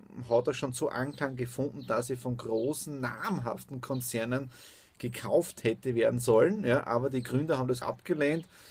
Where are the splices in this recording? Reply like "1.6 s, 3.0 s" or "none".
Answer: 7.8 s